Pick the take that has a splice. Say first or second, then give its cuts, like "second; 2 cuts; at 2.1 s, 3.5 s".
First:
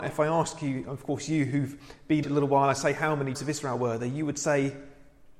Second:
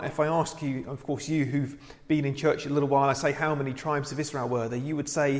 first; 2 cuts; at 2.2 s, 3.3 s